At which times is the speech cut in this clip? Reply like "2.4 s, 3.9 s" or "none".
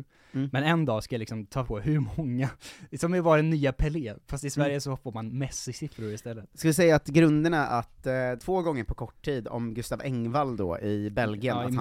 1.6 s, 8.4 s

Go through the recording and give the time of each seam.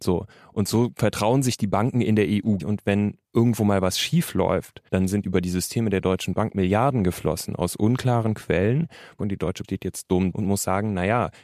2.6 s, 3.2 s, 4.9 s, 5.2 s, 9.6 s, 10.3 s

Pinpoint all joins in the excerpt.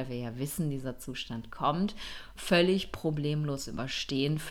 none

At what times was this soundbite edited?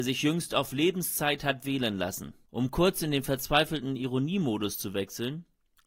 none

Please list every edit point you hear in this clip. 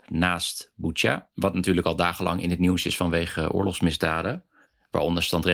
none

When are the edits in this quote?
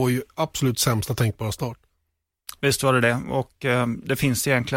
none

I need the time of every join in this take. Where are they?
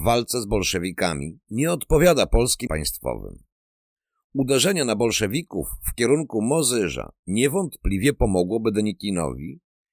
2.7 s

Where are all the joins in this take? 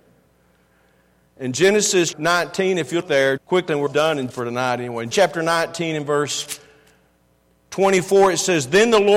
2.1 s, 3.0 s, 3.4 s, 3.9 s, 4.3 s, 5.1 s

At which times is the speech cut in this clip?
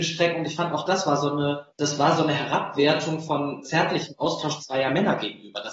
1.7 s, 3.6 s

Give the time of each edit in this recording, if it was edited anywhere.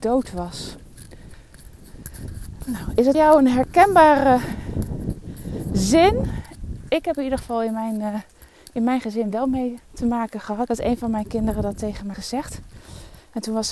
3.1 s, 10.7 s, 12.1 s

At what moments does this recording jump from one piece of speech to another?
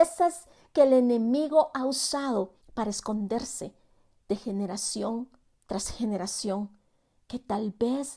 2.6 s

